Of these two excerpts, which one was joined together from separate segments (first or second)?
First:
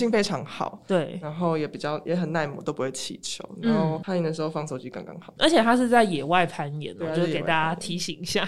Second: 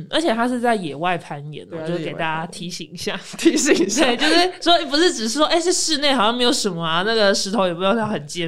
first